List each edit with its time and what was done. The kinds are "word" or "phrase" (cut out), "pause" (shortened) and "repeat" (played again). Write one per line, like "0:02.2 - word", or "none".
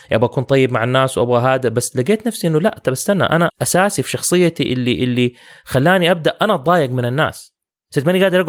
0:03.5 - phrase